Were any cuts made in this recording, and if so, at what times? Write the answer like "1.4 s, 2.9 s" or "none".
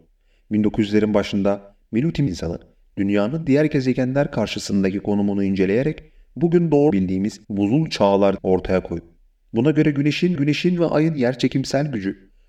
2.3 s, 6.9 s, 7.4 s, 8.4 s, 10.4 s